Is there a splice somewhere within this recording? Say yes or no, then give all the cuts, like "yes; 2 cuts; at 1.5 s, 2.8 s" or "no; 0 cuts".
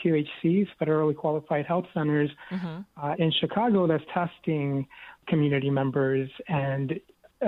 yes; 1 cut; at 4.1 s